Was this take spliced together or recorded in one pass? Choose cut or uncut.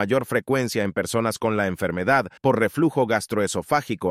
cut